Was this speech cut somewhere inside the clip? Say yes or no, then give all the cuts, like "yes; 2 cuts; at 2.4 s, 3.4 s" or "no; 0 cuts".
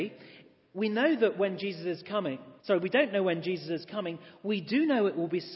yes; 1 cut; at 2.6 s